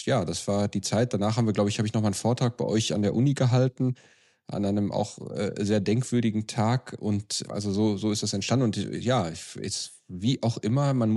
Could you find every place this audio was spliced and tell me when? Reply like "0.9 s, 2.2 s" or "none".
none